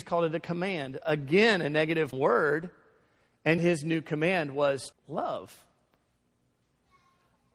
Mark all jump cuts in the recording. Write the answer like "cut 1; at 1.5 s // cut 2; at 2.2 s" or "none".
cut 1; at 1.0 s // cut 2; at 2.1 s // cut 3; at 3.6 s // cut 4; at 4.9 s